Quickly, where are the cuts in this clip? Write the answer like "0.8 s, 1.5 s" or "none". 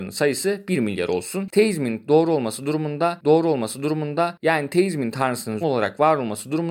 3.2 s, 5.6 s